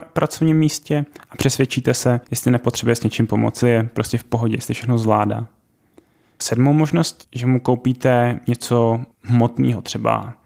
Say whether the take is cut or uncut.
cut